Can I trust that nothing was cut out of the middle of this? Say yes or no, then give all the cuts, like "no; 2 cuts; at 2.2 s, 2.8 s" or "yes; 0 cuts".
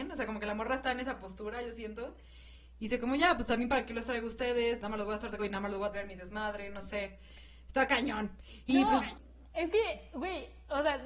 no; 3 cuts; at 4.8 s, 5.4 s, 5.9 s